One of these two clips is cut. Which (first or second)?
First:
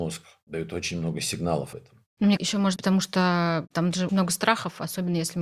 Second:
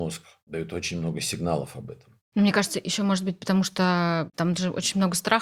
first